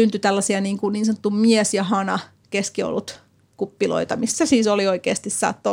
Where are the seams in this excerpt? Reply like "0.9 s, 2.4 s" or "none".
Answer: none